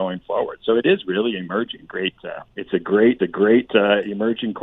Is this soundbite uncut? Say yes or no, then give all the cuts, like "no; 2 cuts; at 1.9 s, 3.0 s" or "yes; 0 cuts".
no; 3 cuts; at 1.9 s, 2.5 s, 3.2 s